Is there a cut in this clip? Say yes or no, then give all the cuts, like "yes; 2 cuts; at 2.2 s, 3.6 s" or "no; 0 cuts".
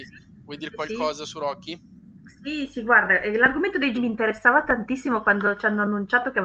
yes; 1 cut; at 3.9 s